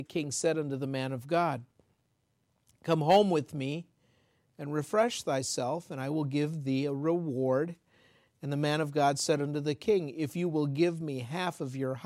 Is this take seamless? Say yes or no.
yes